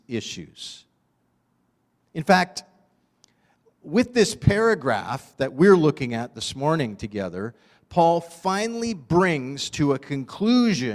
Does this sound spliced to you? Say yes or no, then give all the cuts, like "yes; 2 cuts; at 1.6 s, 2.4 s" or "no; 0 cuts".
no; 0 cuts